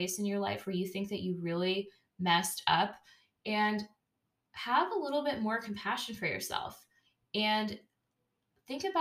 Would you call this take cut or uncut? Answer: uncut